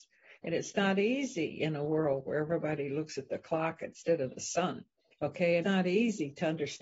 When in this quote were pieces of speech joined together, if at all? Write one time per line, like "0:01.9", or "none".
0:05.0
0:05.6